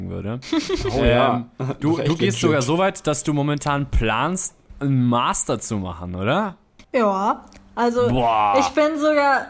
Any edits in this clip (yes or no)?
yes